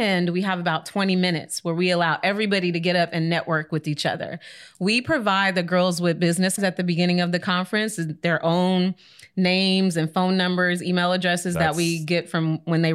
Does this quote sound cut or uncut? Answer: cut